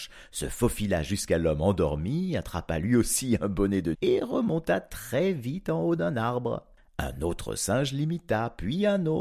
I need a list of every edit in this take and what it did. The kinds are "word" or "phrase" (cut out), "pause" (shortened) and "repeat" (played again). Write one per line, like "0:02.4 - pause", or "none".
0:03.9 - word